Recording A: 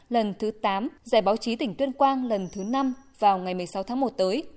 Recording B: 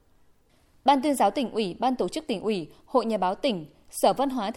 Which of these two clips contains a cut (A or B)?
A